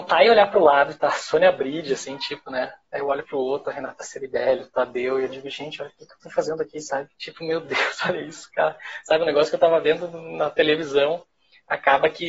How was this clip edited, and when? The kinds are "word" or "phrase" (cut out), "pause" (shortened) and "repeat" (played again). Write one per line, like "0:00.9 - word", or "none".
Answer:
0:07.1 - pause